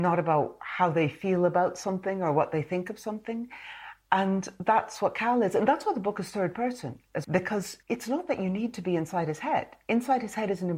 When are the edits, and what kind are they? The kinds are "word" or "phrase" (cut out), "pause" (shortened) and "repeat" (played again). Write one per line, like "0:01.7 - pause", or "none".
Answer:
0:07.2 - word
0:07.8 - pause